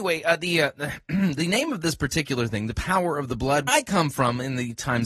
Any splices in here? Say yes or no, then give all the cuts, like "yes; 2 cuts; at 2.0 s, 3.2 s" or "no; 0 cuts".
yes; 1 cut; at 3.7 s